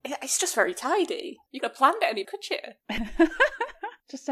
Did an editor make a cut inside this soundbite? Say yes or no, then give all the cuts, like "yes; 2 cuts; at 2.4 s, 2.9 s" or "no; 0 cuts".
yes; 2 cuts; at 1.6 s, 2.2 s